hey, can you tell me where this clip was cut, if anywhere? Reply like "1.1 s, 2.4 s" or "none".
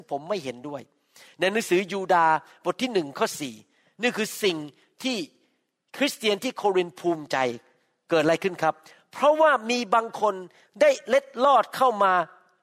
none

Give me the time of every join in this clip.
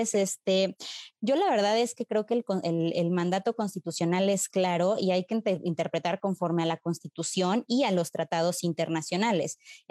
none

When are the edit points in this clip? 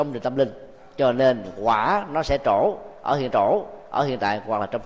3.3 s

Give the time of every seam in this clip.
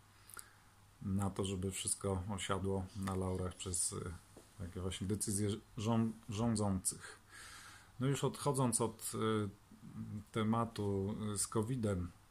none

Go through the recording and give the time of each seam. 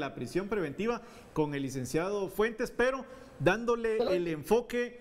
none

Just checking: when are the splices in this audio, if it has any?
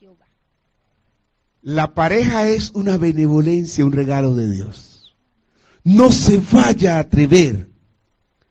none

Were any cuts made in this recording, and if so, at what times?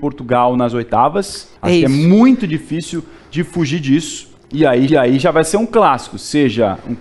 1.6 s, 4.4 s, 4.9 s

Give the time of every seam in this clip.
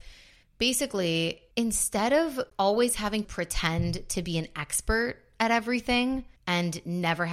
1.5 s, 2.5 s, 3.2 s, 6.4 s

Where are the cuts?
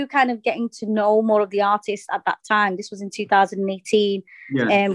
none

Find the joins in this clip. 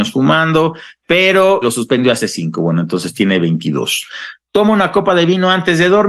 1.6 s

